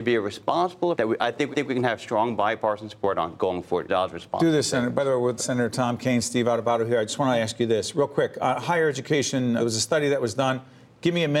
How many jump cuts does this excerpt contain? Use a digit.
5